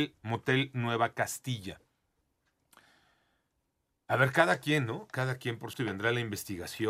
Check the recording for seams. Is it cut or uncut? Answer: cut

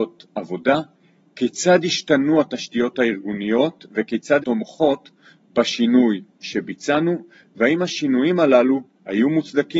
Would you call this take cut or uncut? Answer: cut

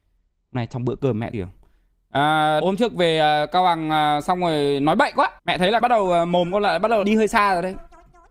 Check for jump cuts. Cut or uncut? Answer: cut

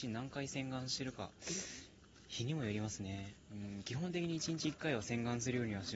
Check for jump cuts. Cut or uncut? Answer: uncut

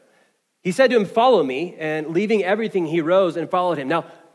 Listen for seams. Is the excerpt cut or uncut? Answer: uncut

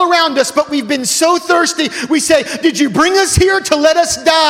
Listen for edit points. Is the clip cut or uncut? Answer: uncut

